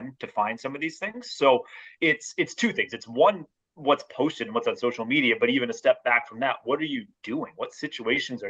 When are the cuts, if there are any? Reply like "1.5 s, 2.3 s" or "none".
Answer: 3.6 s

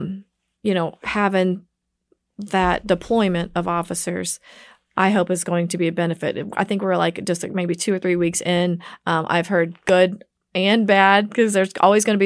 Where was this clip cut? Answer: none

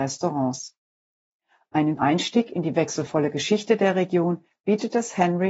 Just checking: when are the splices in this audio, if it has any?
2.0 s

